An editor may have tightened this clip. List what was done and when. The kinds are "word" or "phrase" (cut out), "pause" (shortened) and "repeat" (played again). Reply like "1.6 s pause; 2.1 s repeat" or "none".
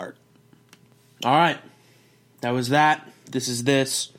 none